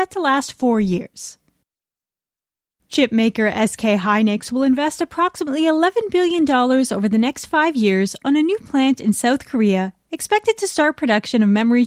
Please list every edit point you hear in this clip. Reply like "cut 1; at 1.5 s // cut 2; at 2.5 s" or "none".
none